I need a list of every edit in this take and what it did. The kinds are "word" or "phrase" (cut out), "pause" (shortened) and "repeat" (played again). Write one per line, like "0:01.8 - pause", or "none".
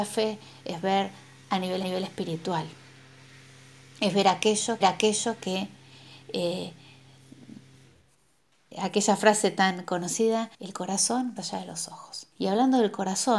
0:01.8 - repeat
0:04.8 - repeat
0:08.7 - word
0:10.5 - pause
0:11.4 - word
0:12.3 - pause